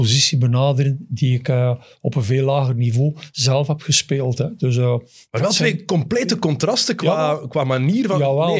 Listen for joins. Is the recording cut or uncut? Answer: uncut